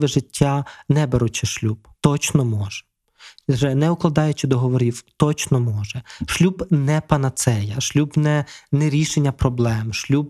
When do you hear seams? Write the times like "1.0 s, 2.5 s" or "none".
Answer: 1.9 s

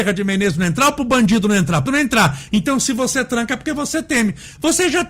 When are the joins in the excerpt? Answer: 1.9 s

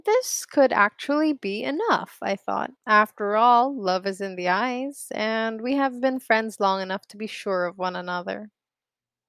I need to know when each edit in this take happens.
2.8 s

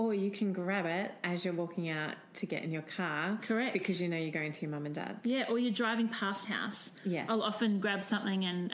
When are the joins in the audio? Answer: 6.4 s

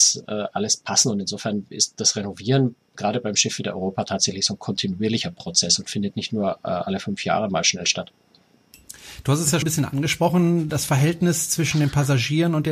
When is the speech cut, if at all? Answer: 9.6 s

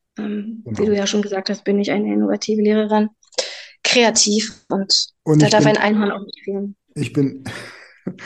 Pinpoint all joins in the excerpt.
5.2 s, 6.8 s

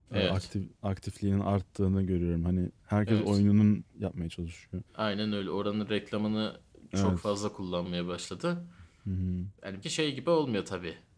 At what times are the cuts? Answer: 3.9 s, 4.9 s, 9.8 s

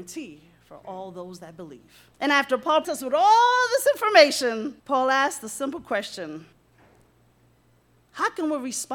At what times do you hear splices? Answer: 2.1 s, 2.8 s, 4.8 s

